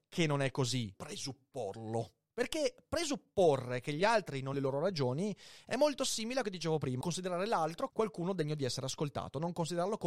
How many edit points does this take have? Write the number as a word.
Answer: five